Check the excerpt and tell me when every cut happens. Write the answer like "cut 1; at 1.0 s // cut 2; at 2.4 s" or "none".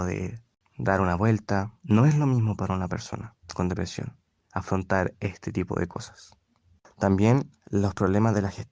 cut 1; at 1.8 s // cut 2; at 3.4 s // cut 3; at 4.4 s // cut 4; at 7.6 s